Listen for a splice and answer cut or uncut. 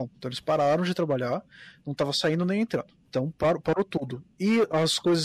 cut